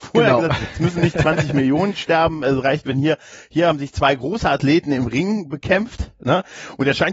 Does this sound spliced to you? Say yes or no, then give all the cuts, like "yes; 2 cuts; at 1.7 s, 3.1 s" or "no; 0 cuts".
no; 0 cuts